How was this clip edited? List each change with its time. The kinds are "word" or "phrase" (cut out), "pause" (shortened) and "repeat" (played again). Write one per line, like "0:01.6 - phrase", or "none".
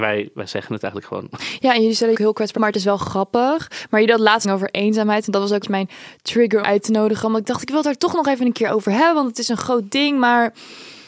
0:02.1 - phrase
0:02.6 - word
0:04.4 - phrase
0:05.6 - word
0:06.6 - phrase